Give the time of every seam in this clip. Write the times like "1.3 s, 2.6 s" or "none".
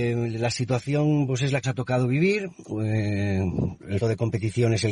1.6 s, 4.0 s

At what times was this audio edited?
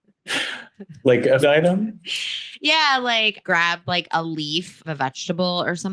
1.4 s, 3.4 s, 4.8 s

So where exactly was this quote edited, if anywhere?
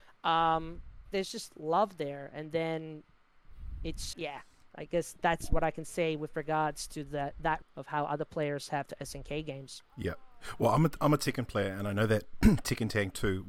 1.1 s, 4.1 s, 7.6 s

